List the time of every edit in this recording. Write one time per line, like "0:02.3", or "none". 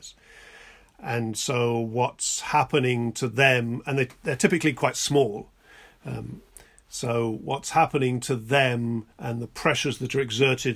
0:09.1